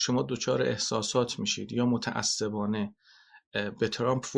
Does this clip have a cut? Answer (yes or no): no